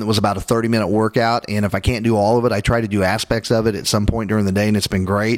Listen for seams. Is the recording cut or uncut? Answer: uncut